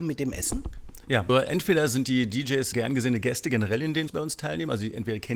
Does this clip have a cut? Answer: yes; 3 cuts; at 1.3 s, 2.7 s, 4.1 s

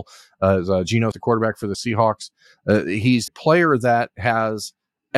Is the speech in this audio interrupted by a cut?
yes; 3 cuts; at 1.1 s, 1.7 s, 3.3 s

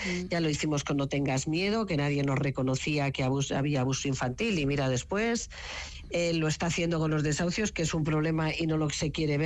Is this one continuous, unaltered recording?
yes; 0 cuts

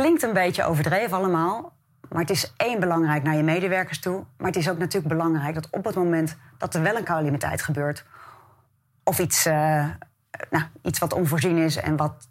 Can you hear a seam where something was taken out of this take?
no; 0 cuts

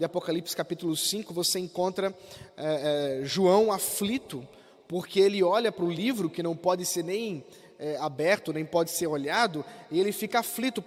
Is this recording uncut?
yes; 0 cuts

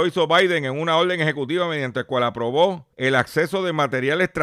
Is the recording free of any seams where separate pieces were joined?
no; 1 cut; at 2.9 s

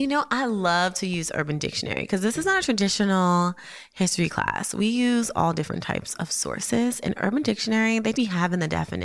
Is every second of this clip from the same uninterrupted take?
no; 1 cut; at 8.1 s

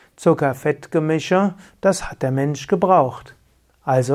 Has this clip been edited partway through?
no; 0 cuts

